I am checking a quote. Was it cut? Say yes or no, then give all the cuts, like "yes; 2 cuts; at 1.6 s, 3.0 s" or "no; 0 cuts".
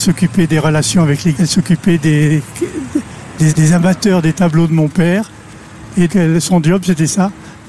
yes; 3 cuts; at 1.3 s, 3.5 s, 6.1 s